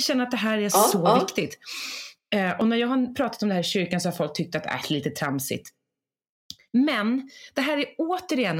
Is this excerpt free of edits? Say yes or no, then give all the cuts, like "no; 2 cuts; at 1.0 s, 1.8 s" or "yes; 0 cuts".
yes; 0 cuts